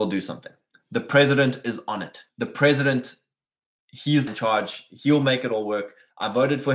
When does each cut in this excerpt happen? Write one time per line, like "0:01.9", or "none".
0:02.3
0:04.3